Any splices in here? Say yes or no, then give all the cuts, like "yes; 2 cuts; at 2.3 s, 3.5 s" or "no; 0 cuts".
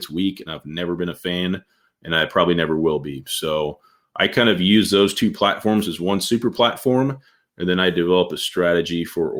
no; 0 cuts